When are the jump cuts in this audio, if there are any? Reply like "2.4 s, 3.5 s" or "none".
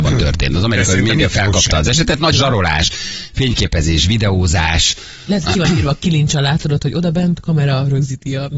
2.3 s

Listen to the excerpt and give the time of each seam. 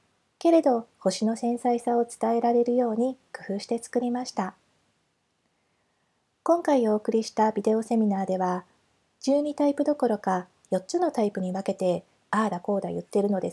none

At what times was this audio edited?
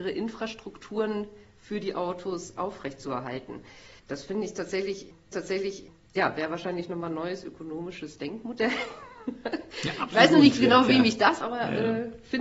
4.0 s, 5.3 s, 11.4 s

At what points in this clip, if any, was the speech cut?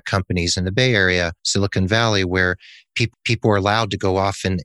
1.4 s, 3.1 s

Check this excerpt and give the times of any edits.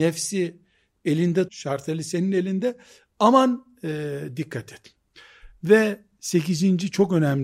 1.5 s

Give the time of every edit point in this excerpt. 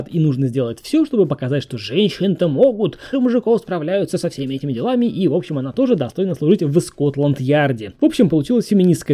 3.1 s

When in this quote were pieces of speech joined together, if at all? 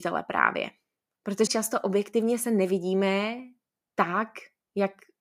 1.5 s

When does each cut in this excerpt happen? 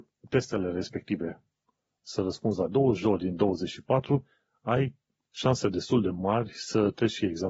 none

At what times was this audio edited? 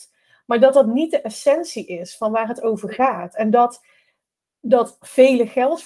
none

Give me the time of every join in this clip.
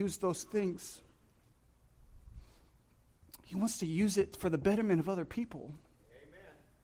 none

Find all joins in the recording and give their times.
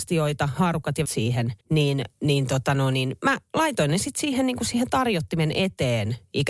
1.1 s, 1.6 s

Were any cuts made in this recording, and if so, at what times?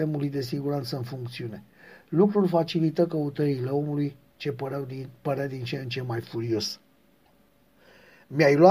none

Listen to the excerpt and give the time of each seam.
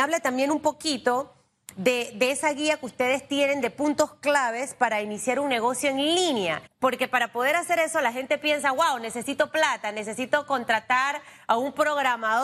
6.7 s

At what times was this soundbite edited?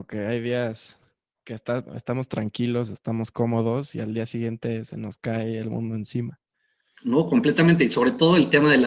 none

